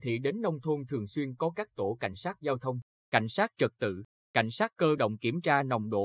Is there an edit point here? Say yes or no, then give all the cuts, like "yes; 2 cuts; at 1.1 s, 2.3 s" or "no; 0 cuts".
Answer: no; 0 cuts